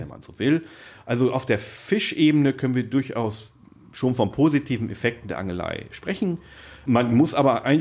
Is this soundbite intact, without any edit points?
yes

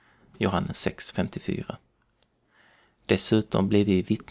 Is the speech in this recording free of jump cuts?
yes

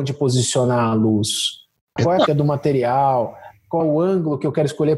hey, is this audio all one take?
no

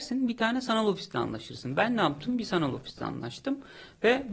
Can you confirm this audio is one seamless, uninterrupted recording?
yes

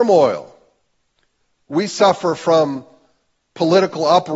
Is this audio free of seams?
yes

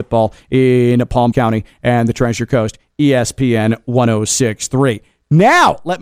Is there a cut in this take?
yes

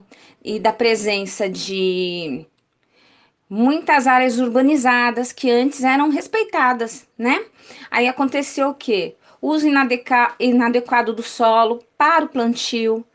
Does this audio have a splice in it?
no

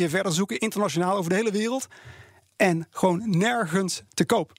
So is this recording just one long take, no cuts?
yes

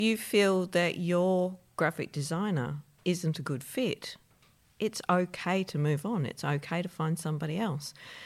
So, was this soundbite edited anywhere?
no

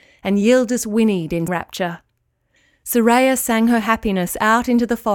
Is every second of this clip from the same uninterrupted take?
no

